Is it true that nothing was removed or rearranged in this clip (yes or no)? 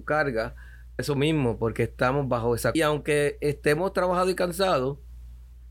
no